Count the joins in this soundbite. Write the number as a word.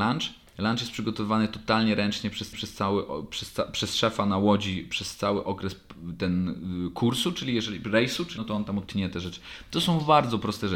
three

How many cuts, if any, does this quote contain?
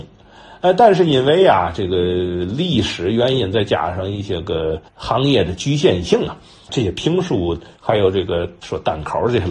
two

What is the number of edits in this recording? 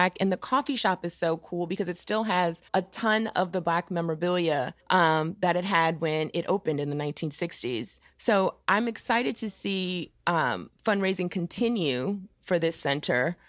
four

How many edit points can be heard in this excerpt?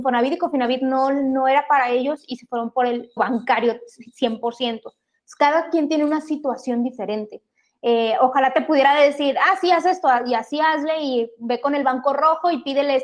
one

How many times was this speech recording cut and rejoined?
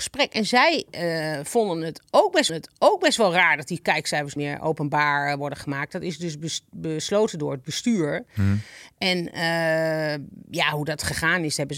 three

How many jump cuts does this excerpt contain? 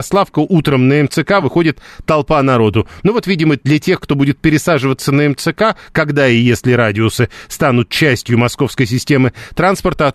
zero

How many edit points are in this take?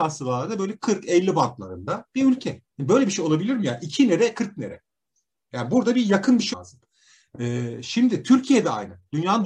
two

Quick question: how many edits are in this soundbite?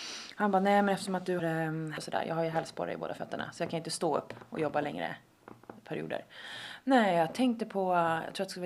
two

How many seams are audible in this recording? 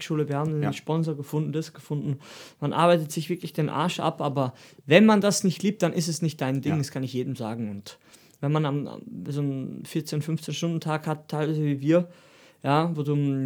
zero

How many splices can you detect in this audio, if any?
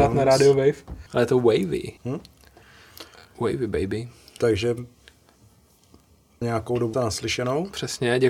four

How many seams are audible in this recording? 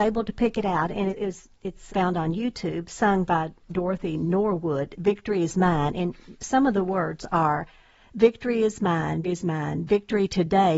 three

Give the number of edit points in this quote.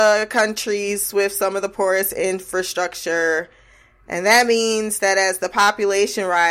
zero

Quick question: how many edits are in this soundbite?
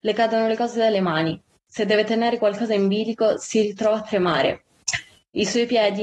zero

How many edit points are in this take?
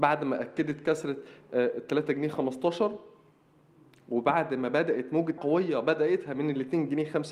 one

